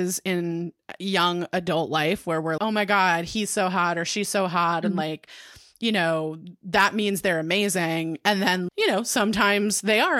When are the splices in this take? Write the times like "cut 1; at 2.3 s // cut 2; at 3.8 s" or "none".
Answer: cut 1; at 2.6 s // cut 2; at 8.7 s

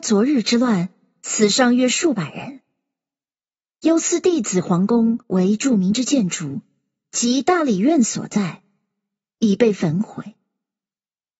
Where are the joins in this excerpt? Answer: cut 1; at 5.2 s

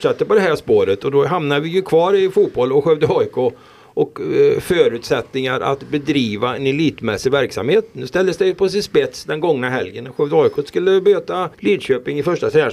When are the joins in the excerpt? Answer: cut 1; at 11.5 s

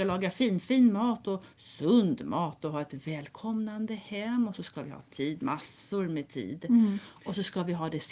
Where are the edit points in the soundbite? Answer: none

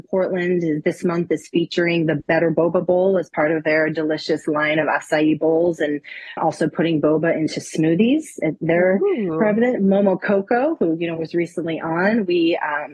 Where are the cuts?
cut 1; at 6.4 s

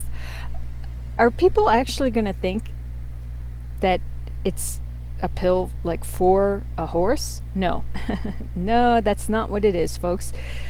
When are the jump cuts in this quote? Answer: none

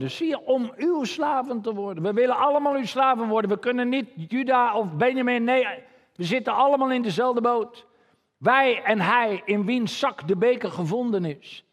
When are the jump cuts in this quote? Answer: none

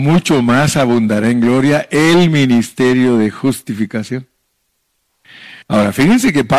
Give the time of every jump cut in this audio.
cut 1; at 5.6 s

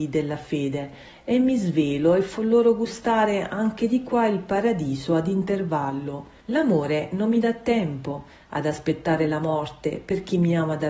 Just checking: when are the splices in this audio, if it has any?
cut 1; at 6.4 s

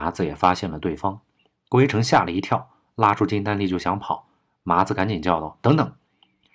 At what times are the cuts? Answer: none

